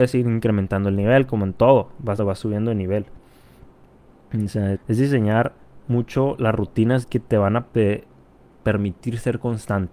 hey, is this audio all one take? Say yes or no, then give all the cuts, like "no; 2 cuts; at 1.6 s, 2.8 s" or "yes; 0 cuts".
no; 3 cuts; at 2.2 s, 4.7 s, 7.0 s